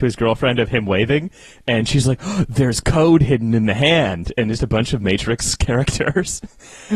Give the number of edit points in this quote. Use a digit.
1